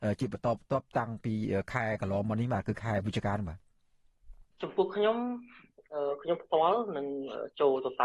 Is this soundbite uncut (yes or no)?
no